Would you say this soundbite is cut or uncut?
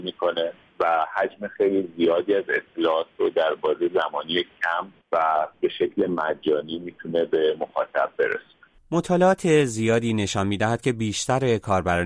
uncut